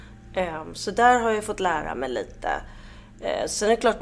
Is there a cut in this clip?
no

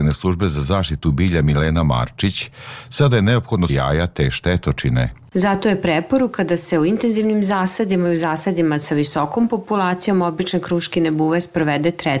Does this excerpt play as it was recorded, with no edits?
no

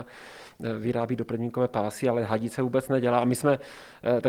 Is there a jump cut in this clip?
no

